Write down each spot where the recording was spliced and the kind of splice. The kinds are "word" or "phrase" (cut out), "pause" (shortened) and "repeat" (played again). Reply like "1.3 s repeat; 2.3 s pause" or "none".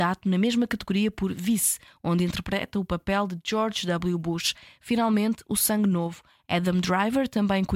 none